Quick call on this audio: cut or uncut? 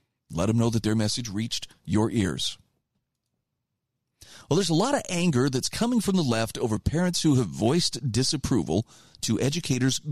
uncut